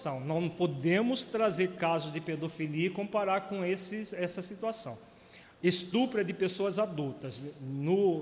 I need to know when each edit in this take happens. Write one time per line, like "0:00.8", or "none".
none